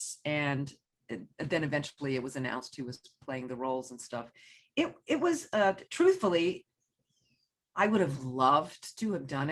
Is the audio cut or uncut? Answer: uncut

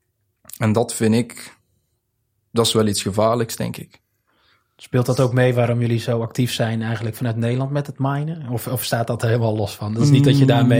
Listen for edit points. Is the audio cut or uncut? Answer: uncut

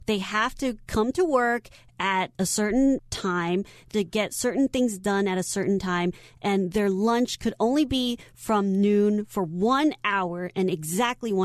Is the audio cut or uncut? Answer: cut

